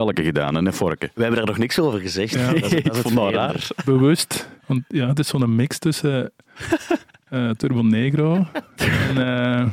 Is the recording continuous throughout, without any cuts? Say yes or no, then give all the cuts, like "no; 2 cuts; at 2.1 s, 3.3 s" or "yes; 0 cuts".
no; 2 cuts; at 4.6 s, 7.6 s